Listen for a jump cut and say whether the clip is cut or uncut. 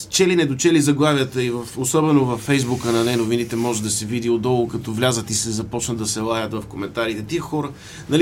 uncut